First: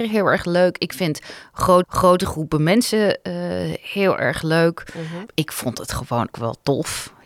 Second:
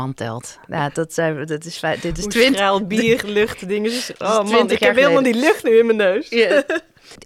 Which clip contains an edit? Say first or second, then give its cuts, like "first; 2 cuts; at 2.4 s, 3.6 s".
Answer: first; 2 cuts; at 1.8 s, 6.3 s